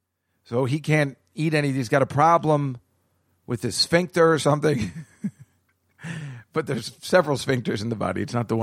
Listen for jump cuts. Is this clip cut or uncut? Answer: uncut